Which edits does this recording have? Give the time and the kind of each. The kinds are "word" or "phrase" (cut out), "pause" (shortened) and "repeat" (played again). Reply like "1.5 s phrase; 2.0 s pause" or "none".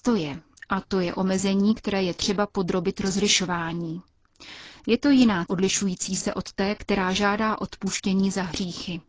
5.5 s word